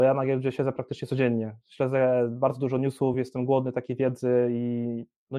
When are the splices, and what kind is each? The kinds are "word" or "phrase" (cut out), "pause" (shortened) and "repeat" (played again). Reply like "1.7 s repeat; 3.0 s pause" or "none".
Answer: none